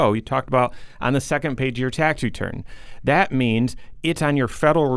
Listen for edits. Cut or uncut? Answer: uncut